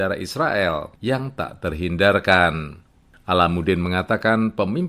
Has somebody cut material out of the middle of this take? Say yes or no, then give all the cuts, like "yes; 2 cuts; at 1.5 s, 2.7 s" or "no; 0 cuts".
no; 0 cuts